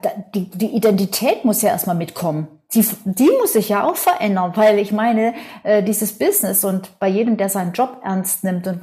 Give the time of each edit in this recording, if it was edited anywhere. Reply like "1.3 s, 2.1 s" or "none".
none